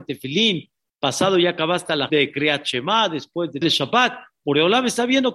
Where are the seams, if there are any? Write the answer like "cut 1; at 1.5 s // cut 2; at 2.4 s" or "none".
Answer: cut 1; at 2.1 s // cut 2; at 3.6 s

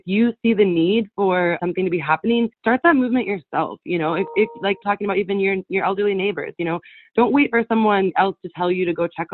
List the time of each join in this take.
cut 1; at 1.6 s // cut 2; at 2.5 s // cut 3; at 4.8 s

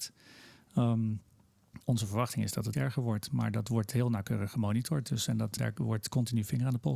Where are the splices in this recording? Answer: cut 1; at 1.8 s // cut 2; at 2.7 s // cut 3; at 5.6 s

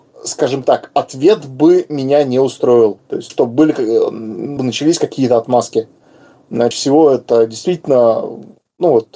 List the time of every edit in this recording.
cut 1; at 3.0 s // cut 2; at 3.3 s // cut 3; at 4.6 s // cut 4; at 6.7 s

